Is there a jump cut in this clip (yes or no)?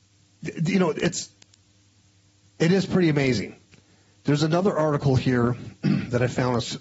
no